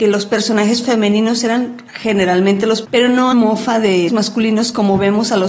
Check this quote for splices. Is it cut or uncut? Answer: cut